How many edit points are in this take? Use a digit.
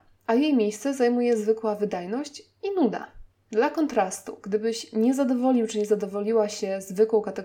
0